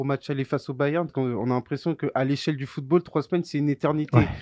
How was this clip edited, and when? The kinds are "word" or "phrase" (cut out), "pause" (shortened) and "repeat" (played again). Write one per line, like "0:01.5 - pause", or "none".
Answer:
0:01.1 - word